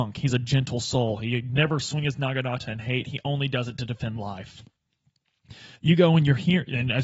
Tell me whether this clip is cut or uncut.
cut